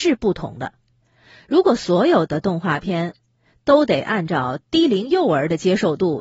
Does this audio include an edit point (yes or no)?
no